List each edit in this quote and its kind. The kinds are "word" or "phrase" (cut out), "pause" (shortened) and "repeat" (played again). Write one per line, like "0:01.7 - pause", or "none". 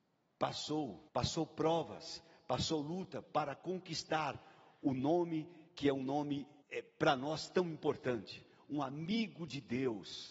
0:01.1 - pause
0:05.7 - pause
0:06.6 - pause